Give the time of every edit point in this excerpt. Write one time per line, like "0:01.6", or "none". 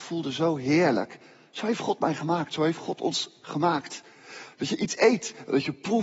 none